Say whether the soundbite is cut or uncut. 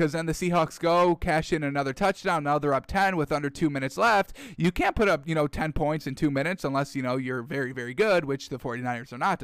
uncut